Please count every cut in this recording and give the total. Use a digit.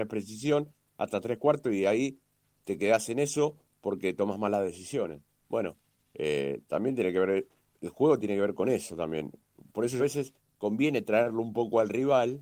1